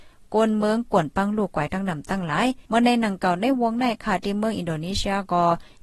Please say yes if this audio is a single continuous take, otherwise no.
no